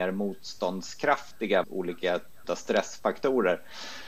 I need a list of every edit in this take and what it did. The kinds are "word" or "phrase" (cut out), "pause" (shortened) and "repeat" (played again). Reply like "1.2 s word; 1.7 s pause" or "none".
1.6 s word; 2.4 s word